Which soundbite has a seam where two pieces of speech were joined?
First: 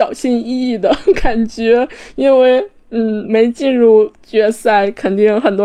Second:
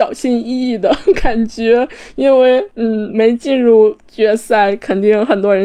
second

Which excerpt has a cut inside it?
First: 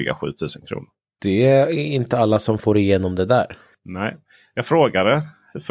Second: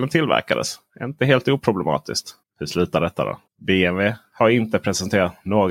second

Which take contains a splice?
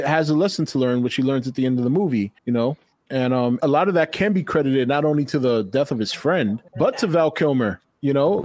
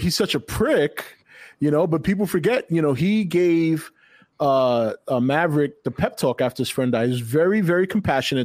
first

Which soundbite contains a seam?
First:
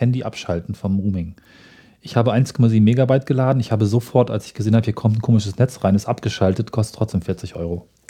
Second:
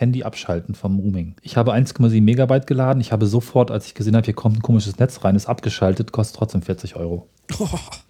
second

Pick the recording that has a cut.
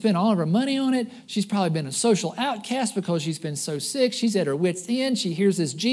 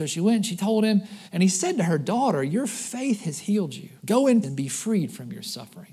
second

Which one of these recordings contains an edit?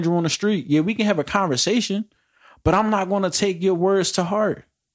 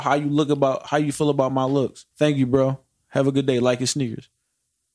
second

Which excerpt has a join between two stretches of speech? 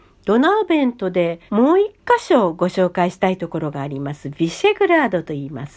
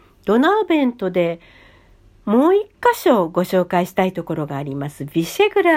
first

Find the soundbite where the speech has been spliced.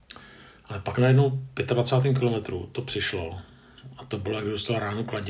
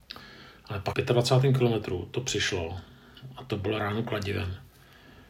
second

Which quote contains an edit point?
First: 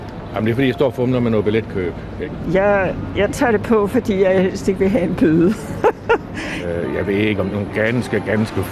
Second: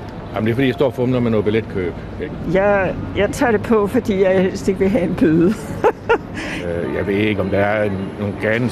first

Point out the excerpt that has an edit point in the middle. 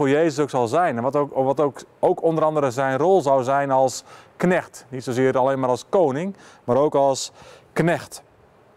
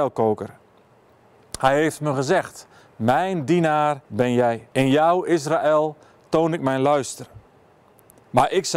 second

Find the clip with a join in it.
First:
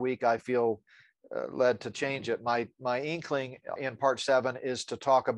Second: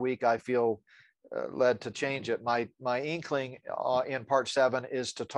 first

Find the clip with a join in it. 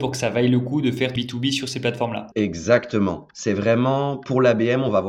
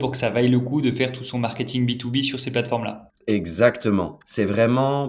first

